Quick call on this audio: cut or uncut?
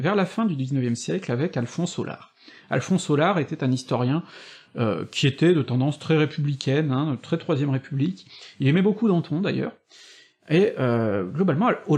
uncut